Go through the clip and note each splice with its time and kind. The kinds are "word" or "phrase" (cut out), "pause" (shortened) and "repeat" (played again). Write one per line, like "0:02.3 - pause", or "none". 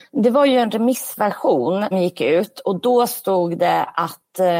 0:01.9 - word